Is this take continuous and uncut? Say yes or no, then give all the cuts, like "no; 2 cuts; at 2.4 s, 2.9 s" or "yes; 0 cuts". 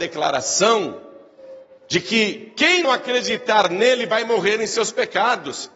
no; 1 cut; at 2.8 s